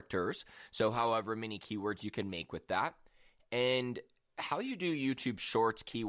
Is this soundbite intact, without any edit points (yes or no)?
yes